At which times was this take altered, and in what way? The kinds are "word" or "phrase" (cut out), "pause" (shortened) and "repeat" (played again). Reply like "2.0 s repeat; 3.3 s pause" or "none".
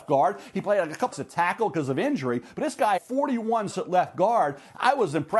1.1 s word; 3.0 s word; 3.7 s word